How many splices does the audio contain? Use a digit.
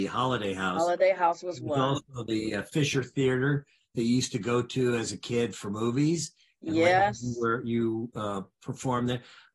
0